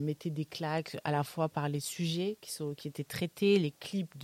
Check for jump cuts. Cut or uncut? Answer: uncut